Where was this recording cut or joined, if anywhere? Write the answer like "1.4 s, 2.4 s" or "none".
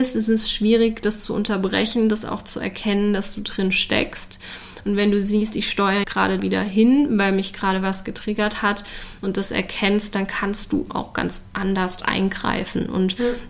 6.0 s, 6.4 s, 10.9 s